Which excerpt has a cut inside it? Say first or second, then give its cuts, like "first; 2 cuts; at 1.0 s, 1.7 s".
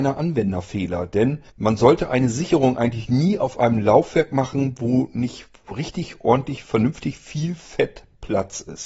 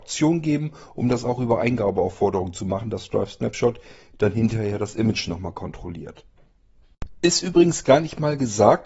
first; 1 cut; at 1.5 s